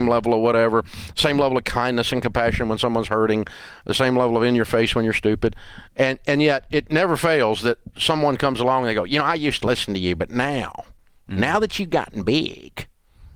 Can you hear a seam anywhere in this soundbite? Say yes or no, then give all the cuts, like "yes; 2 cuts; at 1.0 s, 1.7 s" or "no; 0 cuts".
no; 0 cuts